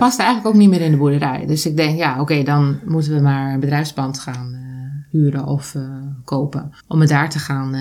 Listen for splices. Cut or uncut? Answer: cut